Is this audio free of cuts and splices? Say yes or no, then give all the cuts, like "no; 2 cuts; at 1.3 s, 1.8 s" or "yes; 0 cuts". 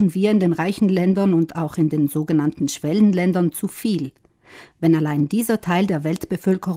yes; 0 cuts